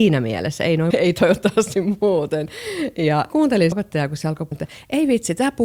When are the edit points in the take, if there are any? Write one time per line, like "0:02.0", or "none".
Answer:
0:00.9
0:03.3
0:03.7
0:04.5